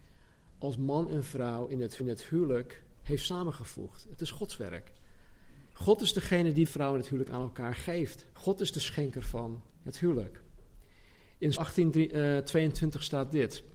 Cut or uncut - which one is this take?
cut